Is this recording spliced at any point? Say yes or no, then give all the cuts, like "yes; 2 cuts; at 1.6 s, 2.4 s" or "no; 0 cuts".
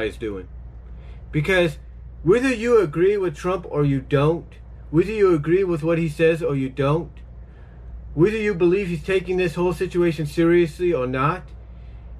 no; 0 cuts